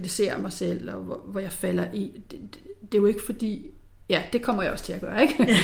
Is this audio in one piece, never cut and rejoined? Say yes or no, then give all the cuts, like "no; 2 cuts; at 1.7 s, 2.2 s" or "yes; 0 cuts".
yes; 0 cuts